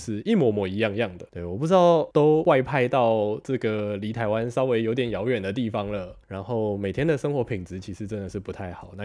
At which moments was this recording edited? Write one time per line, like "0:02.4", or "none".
0:02.1